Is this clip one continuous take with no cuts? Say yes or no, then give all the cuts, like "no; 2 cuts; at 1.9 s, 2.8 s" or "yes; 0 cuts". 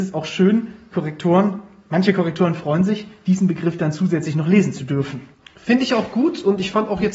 yes; 0 cuts